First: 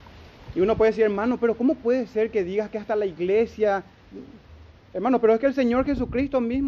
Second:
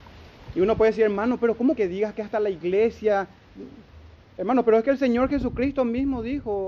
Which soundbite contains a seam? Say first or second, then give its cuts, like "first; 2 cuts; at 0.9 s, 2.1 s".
second; 1 cut; at 1.8 s